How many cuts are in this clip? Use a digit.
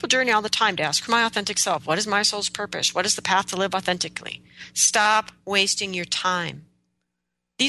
1